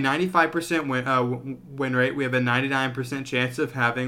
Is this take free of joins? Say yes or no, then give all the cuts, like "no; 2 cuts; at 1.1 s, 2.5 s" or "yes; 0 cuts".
yes; 0 cuts